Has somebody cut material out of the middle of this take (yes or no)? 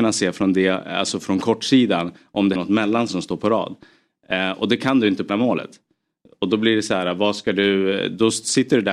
yes